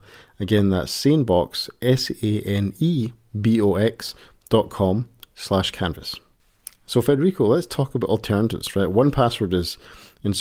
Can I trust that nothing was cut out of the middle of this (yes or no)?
yes